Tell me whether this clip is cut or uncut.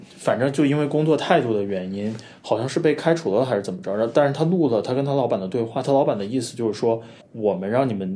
cut